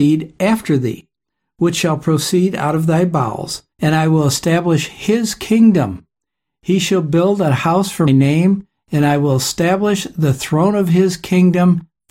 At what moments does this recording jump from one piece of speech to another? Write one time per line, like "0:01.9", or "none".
0:03.7
0:08.1